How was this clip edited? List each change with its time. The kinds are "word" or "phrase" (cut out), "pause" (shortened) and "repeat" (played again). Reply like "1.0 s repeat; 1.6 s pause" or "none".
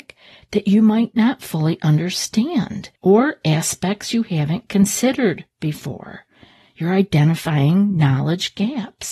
3.0 s pause